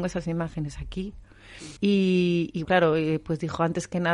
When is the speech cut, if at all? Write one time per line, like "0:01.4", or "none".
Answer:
0:01.8
0:02.6